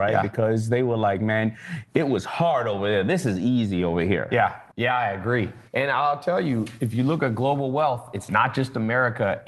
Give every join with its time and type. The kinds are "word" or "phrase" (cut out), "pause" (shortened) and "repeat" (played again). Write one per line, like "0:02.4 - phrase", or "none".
0:04.7 - pause
0:05.7 - pause